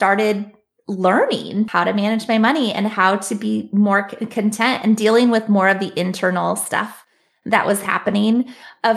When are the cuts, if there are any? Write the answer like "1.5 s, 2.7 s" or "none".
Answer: none